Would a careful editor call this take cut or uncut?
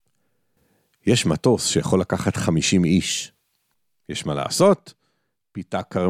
uncut